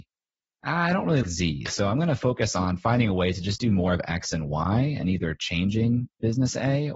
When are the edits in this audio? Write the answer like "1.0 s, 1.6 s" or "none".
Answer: 1.2 s